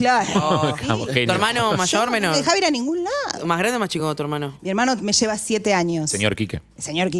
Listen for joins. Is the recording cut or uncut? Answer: uncut